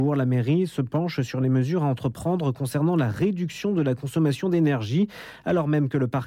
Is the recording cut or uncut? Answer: uncut